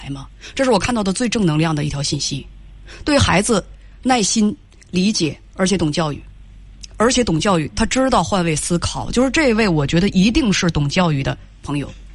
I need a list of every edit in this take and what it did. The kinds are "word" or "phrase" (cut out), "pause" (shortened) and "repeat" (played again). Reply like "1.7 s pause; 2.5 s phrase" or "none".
none